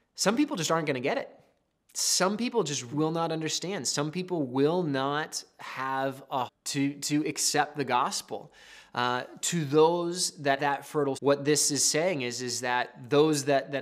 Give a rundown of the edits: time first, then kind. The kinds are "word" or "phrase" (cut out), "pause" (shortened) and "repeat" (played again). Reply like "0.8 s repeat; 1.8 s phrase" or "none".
2.9 s word; 6.5 s word; 10.6 s word; 11.1 s word